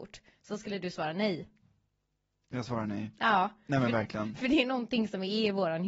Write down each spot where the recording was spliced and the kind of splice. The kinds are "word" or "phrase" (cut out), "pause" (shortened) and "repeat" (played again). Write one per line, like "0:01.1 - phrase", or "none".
none